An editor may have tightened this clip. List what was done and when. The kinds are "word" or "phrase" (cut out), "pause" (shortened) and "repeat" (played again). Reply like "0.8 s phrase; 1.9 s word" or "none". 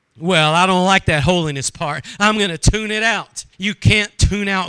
3.5 s pause